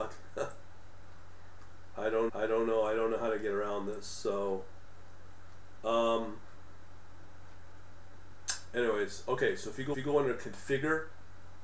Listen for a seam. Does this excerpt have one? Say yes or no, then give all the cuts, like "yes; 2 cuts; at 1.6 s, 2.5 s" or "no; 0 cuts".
yes; 2 cuts; at 2.3 s, 9.9 s